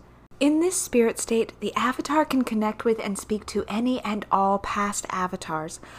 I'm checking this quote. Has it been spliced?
no; 0 cuts

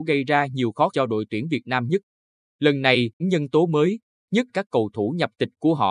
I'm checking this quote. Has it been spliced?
yes; 3 cuts; at 0.9 s, 3.2 s, 4.5 s

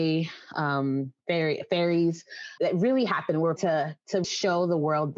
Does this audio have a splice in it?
yes; 3 cuts; at 2.6 s, 3.6 s, 4.2 s

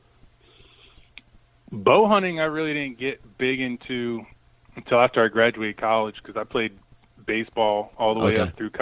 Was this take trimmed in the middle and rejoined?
no; 0 cuts

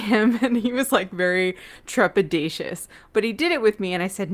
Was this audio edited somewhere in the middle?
no; 0 cuts

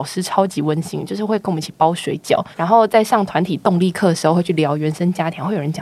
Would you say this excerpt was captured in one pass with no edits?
no; 1 cut; at 2.5 s

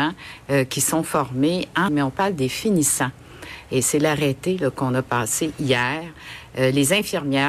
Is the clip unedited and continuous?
no; 1 cut; at 1.9 s

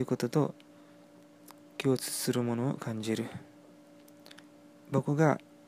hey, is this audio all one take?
yes; 0 cuts

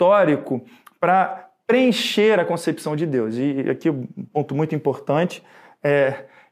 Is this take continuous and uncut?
yes; 0 cuts

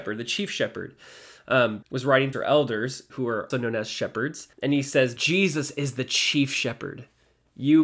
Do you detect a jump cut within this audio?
yes; 6 cuts; at 1.8 s, 2.3 s, 3.1 s, 3.5 s, 4.5 s, 5.2 s

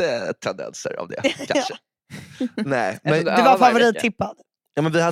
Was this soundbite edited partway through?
no; 0 cuts

